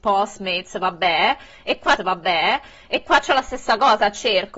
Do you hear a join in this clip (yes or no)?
yes